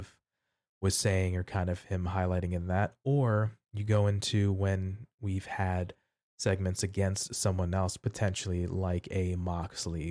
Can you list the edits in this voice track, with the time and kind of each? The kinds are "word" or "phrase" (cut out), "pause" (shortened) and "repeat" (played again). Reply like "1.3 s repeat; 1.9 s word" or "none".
none